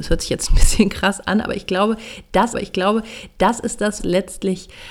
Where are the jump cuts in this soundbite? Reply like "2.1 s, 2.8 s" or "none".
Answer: 2.5 s, 4.0 s